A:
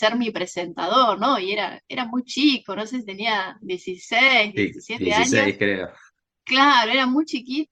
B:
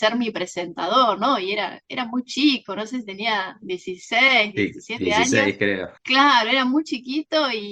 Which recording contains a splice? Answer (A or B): B